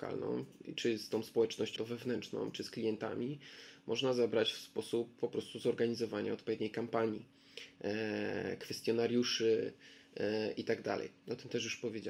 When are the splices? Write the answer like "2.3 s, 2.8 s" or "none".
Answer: 1.8 s